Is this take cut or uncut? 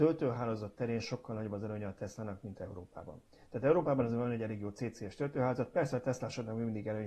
cut